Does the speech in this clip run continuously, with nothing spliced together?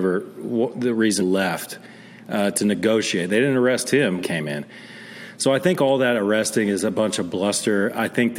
no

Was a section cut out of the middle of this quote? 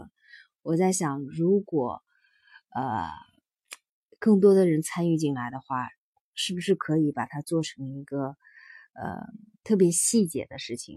no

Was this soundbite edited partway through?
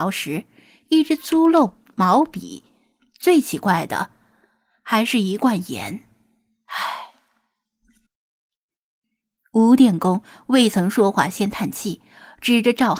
no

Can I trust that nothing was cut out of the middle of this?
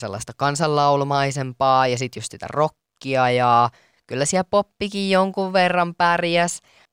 yes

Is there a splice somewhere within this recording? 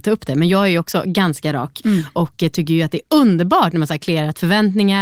no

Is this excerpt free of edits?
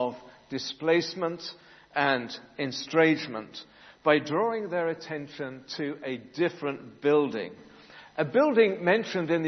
yes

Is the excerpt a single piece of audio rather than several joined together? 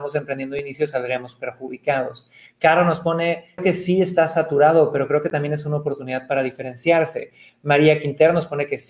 no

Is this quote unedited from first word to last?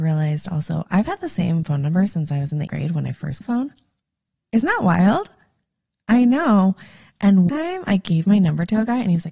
no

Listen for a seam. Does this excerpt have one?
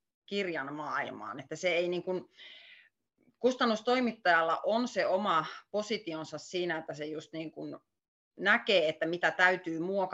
no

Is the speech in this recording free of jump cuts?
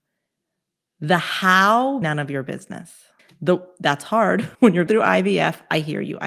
no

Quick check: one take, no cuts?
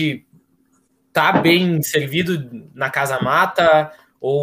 yes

